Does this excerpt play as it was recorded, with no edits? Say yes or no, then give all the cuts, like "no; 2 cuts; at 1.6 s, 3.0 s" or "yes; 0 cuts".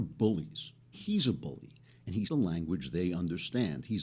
no; 2 cuts; at 0.9 s, 2.3 s